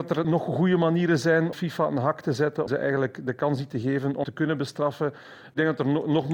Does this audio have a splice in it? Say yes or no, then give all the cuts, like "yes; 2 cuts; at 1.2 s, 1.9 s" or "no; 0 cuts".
yes; 3 cuts; at 1.5 s, 2.7 s, 4.2 s